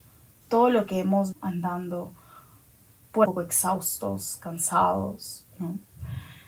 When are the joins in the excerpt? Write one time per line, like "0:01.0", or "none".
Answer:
0:01.3
0:03.3